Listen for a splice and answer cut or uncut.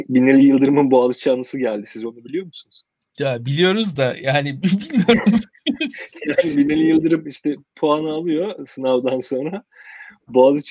uncut